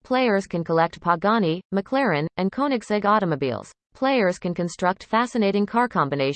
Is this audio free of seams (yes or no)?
no